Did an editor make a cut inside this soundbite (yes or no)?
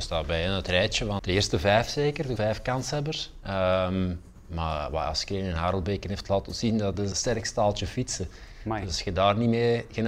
yes